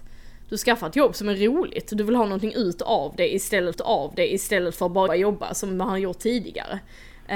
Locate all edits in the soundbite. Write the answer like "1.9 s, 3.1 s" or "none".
3.7 s, 5.1 s